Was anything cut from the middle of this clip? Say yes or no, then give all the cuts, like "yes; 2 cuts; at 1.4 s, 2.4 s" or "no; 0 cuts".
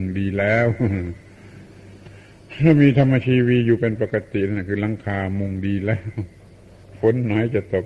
no; 0 cuts